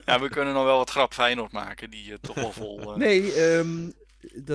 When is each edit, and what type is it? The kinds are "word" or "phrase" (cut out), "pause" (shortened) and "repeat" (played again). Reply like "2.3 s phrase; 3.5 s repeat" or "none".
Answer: 1.1 s word; 2.3 s word

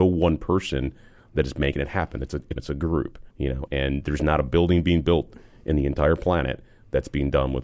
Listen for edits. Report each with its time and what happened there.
2.6 s phrase; 3.3 s pause; 3.7 s word

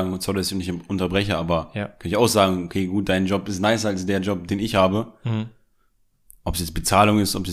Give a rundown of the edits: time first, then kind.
none

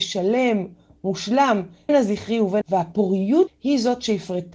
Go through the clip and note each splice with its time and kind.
1.9 s word; 2.6 s word; 3.5 s word

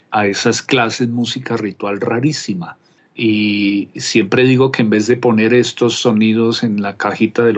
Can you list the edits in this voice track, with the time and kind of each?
none

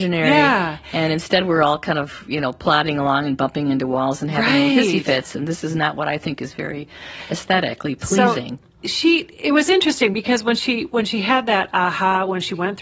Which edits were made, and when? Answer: none

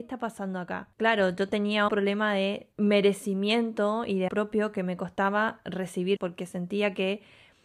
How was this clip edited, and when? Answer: 0.9 s pause; 1.9 s word; 2.7 s pause; 4.3 s word; 6.2 s word

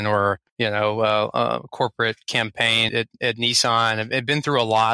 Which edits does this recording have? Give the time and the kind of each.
2.9 s word

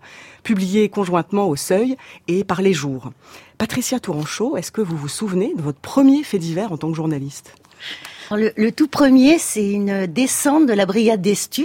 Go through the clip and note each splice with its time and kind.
8.3 s word

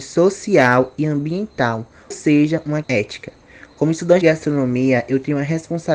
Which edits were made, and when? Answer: 2.1 s word; 2.8 s word; 4.2 s word

